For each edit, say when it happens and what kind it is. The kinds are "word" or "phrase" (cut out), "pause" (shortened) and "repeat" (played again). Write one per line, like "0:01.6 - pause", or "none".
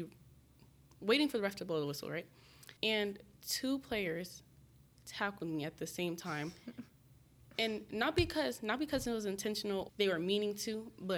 0:02.8 - pause
0:09.9 - word